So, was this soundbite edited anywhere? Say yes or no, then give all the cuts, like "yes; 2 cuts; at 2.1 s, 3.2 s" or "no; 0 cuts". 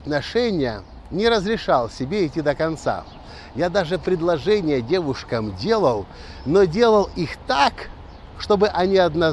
no; 0 cuts